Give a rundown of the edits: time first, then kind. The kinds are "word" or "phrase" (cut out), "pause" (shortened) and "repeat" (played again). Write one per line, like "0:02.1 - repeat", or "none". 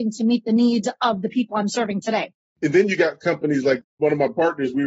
none